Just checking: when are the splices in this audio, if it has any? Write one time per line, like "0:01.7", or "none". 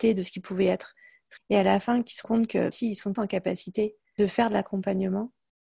0:01.4
0:02.2
0:02.7
0:03.2
0:04.2